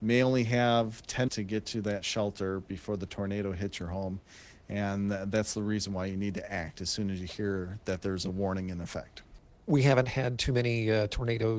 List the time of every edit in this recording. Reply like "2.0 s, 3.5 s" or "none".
1.3 s